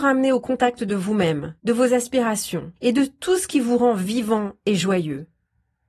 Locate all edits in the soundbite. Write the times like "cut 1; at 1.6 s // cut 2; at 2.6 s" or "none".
cut 1; at 1.6 s // cut 2; at 2.8 s

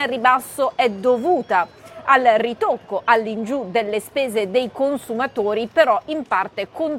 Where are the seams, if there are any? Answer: none

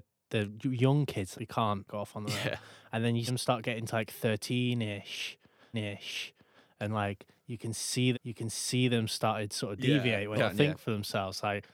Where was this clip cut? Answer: cut 1; at 1.3 s // cut 2; at 1.9 s // cut 3; at 3.3 s // cut 4; at 5.7 s // cut 5; at 8.1 s // cut 6; at 10.4 s

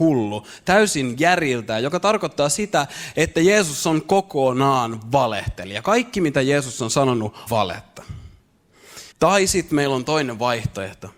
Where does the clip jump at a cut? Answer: cut 1; at 7.5 s // cut 2; at 9.1 s

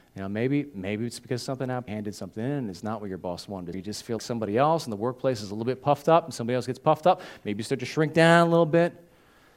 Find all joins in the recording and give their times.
cut 1; at 1.9 s // cut 2; at 3.7 s // cut 3; at 4.2 s

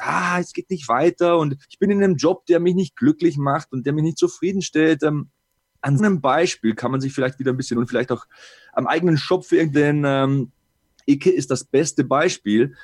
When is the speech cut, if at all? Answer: cut 1; at 1.6 s // cut 2; at 6.0 s // cut 3; at 7.7 s // cut 4; at 9.7 s

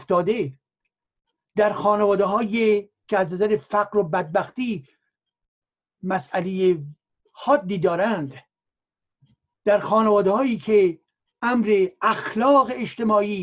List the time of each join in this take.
none

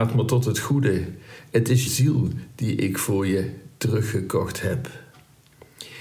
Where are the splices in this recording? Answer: cut 1; at 1.9 s

